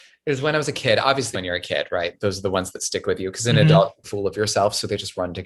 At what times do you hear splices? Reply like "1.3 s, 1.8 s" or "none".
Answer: 1.3 s, 4.0 s